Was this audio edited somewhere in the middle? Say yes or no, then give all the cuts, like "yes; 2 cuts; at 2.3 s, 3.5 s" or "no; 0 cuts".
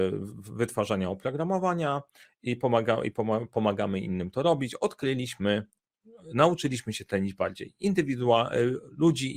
no; 0 cuts